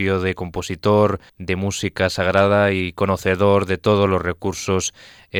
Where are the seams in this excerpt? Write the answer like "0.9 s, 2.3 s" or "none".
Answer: 1.3 s